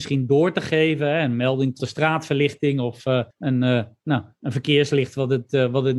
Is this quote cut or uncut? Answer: cut